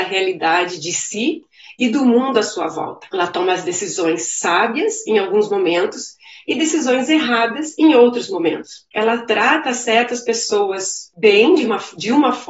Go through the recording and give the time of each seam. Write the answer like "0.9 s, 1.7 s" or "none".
none

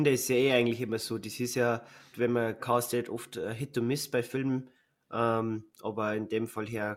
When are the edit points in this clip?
2.1 s, 2.6 s

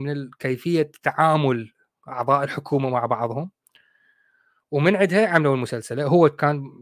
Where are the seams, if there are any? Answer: none

